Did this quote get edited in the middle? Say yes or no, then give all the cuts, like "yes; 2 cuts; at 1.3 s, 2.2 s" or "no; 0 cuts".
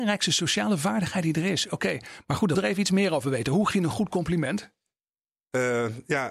yes; 2 cuts; at 2.5 s, 3.7 s